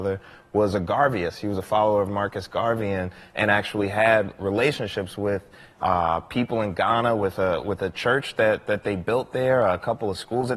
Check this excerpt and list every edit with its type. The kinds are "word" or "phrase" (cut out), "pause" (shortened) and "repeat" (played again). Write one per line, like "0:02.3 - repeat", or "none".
none